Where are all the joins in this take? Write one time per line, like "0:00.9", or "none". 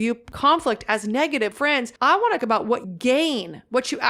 0:01.5
0:02.0
0:02.4
0:02.8